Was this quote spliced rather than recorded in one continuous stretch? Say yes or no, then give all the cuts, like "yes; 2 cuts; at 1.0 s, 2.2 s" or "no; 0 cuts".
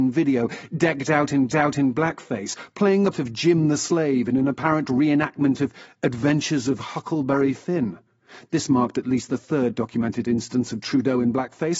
yes; 2 cuts; at 1.5 s, 3.1 s